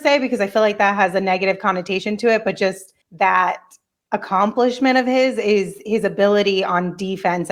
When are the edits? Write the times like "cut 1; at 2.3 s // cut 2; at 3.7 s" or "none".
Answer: cut 1; at 3.0 s

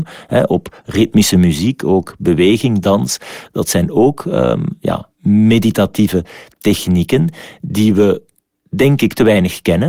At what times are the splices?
cut 1; at 5.1 s

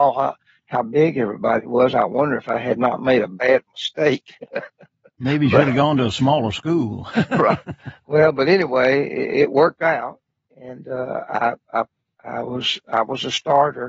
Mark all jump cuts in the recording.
none

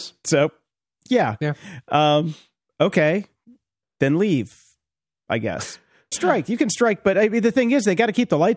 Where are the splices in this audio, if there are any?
cut 1; at 6.1 s

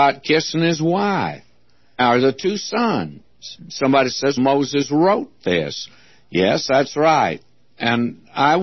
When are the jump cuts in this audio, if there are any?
cut 1; at 3.6 s // cut 2; at 4.4 s

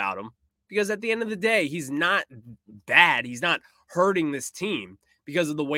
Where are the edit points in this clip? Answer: none

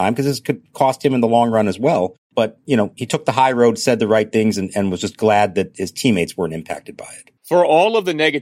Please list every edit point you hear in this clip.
cut 1; at 7.4 s

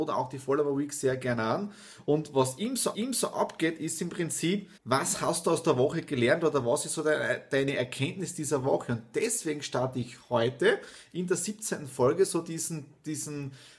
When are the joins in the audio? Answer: cut 1; at 2.9 s // cut 2; at 4.8 s

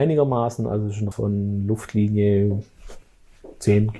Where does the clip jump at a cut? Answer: cut 1; at 1.1 s

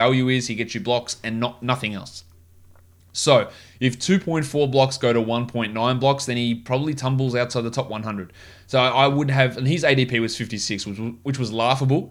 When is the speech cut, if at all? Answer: none

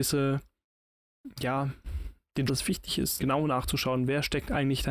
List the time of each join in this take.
cut 1; at 2.5 s // cut 2; at 3.2 s

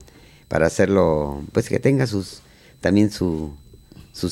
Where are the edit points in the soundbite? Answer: none

